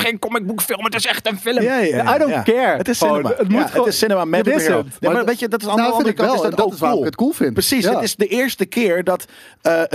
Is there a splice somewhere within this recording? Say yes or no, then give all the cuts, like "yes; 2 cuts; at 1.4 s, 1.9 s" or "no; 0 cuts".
yes; 1 cut; at 4.4 s